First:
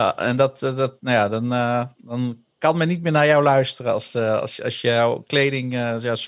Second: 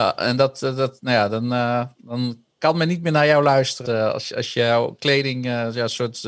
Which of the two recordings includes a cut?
second; 1 cut; at 3.9 s

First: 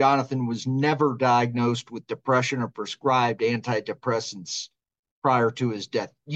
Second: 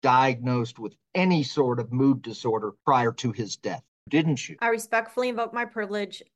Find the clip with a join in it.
second; 1 cut; at 2.8 s

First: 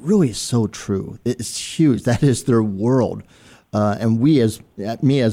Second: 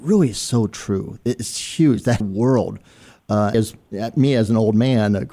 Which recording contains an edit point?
second; 2 cuts; at 2.2 s, 3.5 s

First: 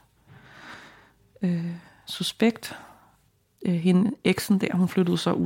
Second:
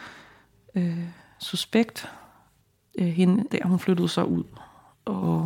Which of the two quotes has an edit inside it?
second; 1 cut; at 3.5 s

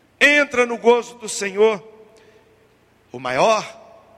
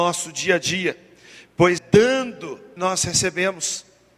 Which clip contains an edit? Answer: second; 2 cuts; at 1.8 s, 2.8 s

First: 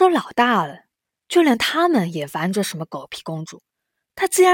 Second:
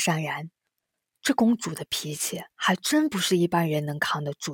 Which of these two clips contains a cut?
second; 1 cut; at 2.6 s

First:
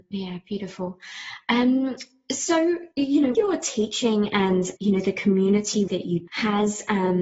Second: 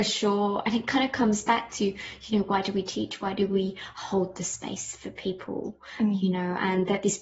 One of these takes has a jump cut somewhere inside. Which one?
first; 5 cuts; at 2.9 s, 3.3 s, 4.8 s, 5.9 s, 6.3 s

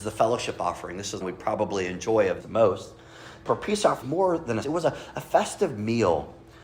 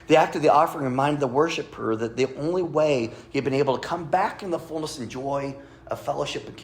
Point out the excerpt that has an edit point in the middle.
first; 5 cuts; at 1.2 s, 2.4 s, 3.5 s, 4.0 s, 4.6 s

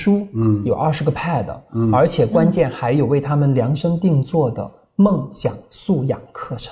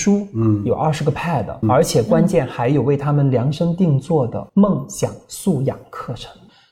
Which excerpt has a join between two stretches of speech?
second; 2 cuts; at 1.6 s, 4.5 s

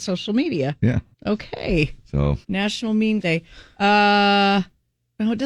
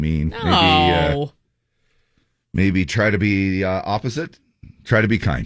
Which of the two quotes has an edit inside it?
first; 3 cuts; at 1.1 s, 2.4 s, 3.2 s

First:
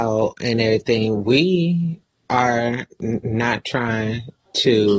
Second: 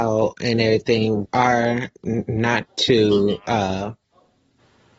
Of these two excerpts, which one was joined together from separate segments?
second; 2 cuts; at 1.3 s, 2.7 s

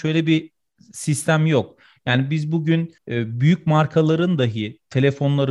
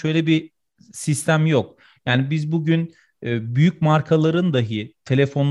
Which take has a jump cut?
first; 1 cut; at 3.0 s

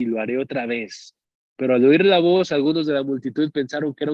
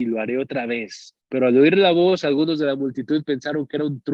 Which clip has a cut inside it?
second; 1 cut; at 1.2 s

